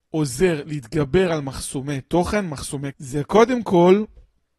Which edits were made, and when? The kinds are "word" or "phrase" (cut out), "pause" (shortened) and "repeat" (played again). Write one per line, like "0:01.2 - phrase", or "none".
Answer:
0:02.9 - word

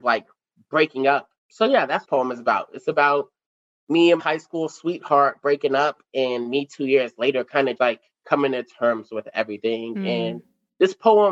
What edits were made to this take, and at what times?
0:01.4 - pause
0:02.0 - phrase
0:04.2 - word
0:07.8 - word

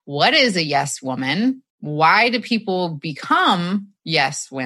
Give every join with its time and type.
0:01.7 - pause

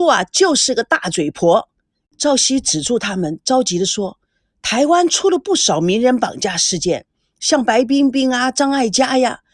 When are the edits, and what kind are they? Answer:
none

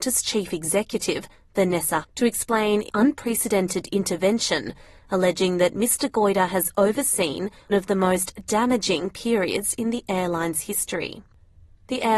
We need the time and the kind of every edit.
0:02.0 - word
0:02.9 - word
0:07.7 - word

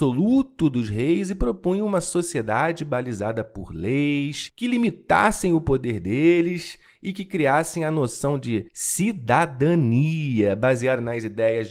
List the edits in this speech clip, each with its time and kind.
0:08.7 - pause

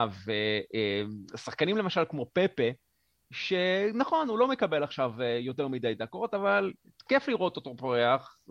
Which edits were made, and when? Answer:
none

